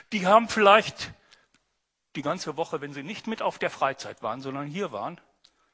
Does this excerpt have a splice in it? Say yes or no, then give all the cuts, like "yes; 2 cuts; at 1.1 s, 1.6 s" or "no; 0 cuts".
no; 0 cuts